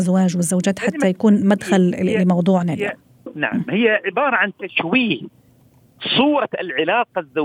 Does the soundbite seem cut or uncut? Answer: uncut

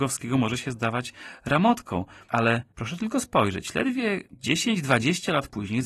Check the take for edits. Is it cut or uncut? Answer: uncut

